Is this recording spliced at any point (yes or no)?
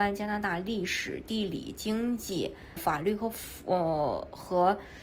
yes